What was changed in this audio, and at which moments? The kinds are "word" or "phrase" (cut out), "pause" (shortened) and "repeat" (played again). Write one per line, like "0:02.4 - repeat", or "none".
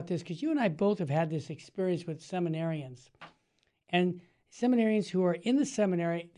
none